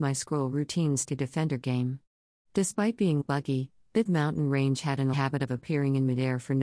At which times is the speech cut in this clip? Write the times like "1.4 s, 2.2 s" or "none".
1.1 s, 3.2 s, 4.1 s, 5.1 s